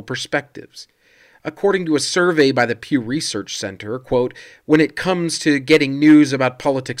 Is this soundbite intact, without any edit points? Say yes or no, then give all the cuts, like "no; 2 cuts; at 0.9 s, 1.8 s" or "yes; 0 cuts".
yes; 0 cuts